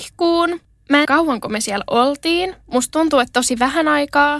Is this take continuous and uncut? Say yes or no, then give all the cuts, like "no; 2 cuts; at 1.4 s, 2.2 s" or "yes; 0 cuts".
no; 1 cut; at 1.0 s